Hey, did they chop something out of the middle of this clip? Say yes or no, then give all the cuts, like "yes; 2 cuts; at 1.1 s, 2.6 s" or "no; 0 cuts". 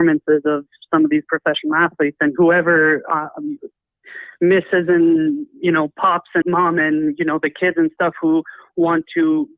yes; 1 cut; at 6.4 s